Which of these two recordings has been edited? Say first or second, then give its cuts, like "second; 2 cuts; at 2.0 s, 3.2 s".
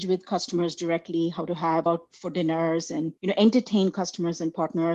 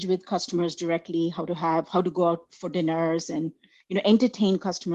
first; 2 cuts; at 1.9 s, 3.2 s